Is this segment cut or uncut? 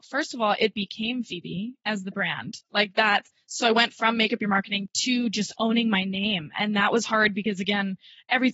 uncut